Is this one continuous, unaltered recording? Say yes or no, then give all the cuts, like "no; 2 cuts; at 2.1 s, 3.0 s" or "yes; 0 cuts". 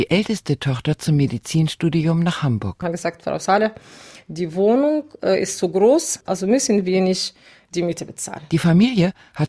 yes; 0 cuts